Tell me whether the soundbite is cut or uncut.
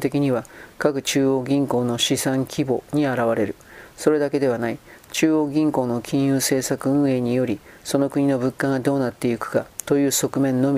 uncut